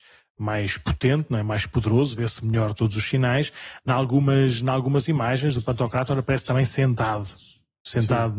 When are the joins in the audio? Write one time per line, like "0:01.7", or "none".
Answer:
0:02.7